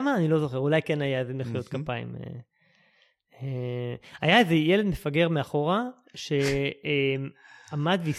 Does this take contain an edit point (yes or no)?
no